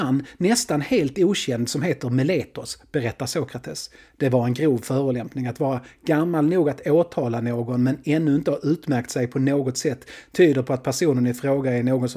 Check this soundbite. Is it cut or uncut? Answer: uncut